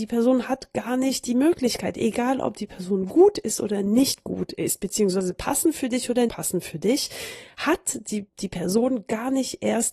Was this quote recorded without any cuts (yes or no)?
no